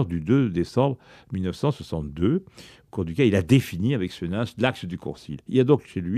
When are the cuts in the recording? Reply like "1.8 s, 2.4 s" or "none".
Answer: none

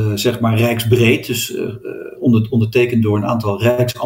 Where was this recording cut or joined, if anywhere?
none

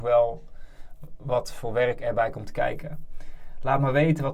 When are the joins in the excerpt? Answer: none

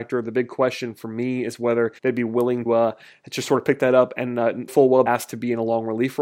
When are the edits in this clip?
2.0 s, 2.7 s, 4.7 s, 5.1 s

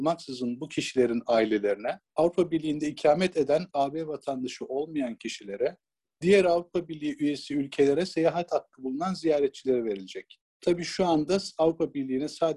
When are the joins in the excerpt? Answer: 2.1 s, 3.7 s, 6.0 s

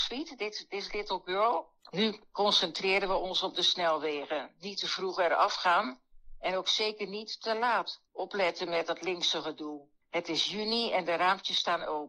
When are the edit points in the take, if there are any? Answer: 8.1 s, 10.0 s

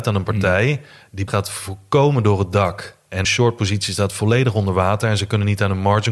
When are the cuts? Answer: 1.3 s, 3.2 s

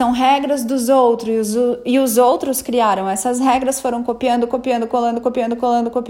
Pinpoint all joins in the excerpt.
none

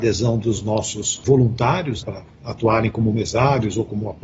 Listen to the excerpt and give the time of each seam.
2.0 s

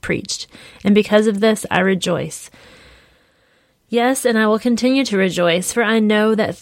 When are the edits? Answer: none

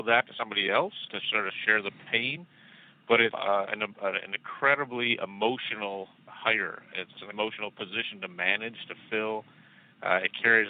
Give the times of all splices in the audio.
1.1 s, 3.3 s, 6.3 s, 7.3 s

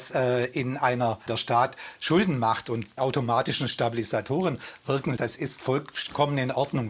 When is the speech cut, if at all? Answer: 1.3 s, 3.0 s, 5.2 s

